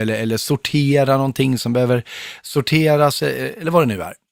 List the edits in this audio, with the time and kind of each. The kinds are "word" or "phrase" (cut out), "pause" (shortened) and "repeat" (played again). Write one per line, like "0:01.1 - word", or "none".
none

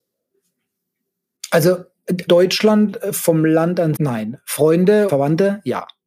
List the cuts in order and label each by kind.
0:02.3 - word
0:04.0 - word
0:05.1 - word

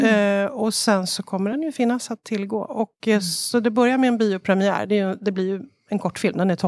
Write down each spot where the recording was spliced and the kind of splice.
none

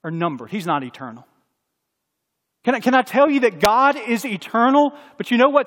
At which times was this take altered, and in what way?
none

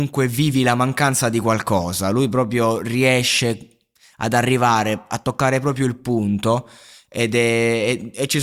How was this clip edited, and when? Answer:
none

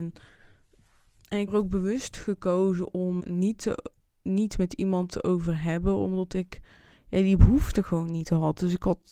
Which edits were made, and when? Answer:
0:01.5 - word
0:03.2 - word

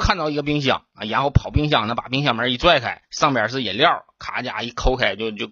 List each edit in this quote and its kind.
0:03.0 - pause

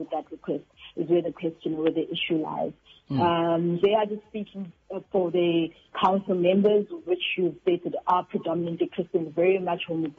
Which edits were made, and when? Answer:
0:03.8 - word
0:05.0 - word
0:05.9 - word
0:07.6 - word

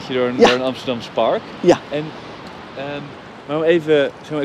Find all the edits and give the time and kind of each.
none

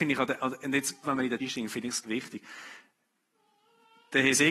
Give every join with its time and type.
0:01.0 - word
0:01.4 - word
0:02.0 - word

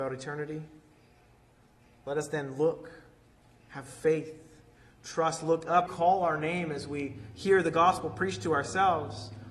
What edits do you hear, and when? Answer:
0:05.9 - phrase

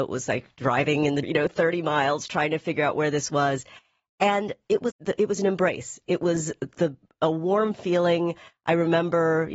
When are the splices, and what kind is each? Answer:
0:01.2 - phrase
0:04.9 - word

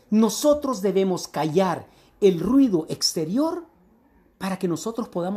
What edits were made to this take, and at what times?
none

